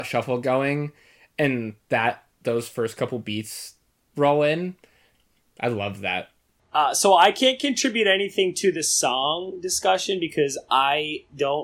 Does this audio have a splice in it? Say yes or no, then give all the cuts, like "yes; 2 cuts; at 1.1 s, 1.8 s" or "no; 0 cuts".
no; 0 cuts